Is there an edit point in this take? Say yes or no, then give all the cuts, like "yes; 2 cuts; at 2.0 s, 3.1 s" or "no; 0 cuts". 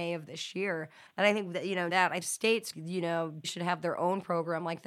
yes; 5 cuts; at 1.1 s, 1.9 s, 2.2 s, 2.7 s, 3.4 s